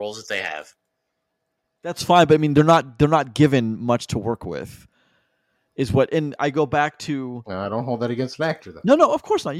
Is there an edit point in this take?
yes; 1 cut; at 6.4 s

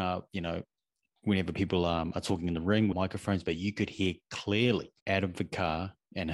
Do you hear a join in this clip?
yes; 2 cuts; at 2.9 s, 5.0 s

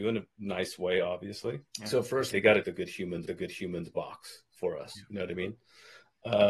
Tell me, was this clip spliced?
yes; 4 cuts; at 1.7 s, 2.3 s, 2.6 s, 3.3 s

